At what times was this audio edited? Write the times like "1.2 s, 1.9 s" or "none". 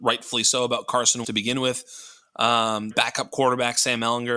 1.2 s, 2.9 s